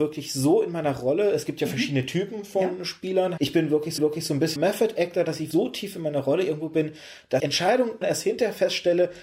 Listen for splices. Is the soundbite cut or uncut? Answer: cut